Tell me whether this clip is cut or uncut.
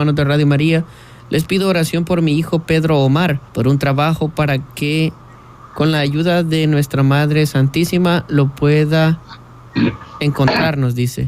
cut